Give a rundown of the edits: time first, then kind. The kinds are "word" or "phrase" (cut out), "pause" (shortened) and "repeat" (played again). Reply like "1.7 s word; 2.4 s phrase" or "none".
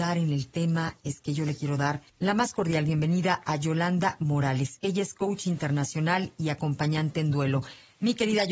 2.1 s pause